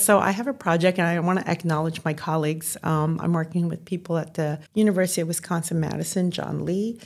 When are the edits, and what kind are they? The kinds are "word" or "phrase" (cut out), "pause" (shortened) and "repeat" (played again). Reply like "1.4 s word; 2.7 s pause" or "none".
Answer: 4.7 s pause